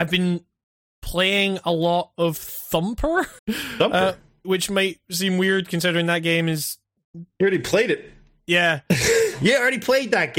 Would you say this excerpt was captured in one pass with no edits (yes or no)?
no